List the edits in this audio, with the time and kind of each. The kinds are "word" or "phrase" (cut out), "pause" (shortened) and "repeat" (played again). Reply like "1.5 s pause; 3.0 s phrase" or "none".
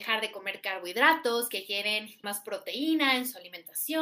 2.2 s word